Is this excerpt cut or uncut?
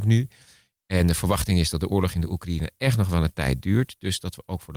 uncut